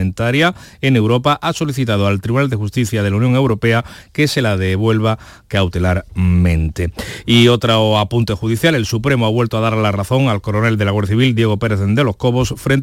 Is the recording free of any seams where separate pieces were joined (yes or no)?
yes